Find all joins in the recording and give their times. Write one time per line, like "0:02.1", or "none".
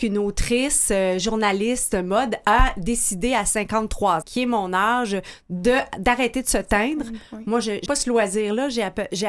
0:04.2
0:07.9